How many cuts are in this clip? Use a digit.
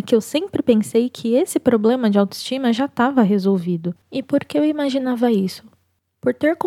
1